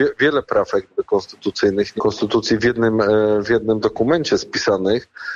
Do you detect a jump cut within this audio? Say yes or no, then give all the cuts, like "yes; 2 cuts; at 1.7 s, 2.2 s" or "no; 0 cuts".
yes; 1 cut; at 2.0 s